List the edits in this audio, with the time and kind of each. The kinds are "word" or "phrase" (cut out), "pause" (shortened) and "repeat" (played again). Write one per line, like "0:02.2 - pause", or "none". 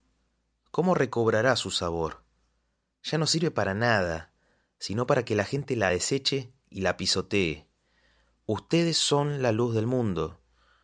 none